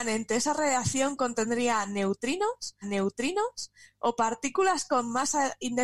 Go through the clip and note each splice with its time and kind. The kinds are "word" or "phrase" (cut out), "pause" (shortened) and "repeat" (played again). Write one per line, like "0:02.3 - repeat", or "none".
0:02.8 - repeat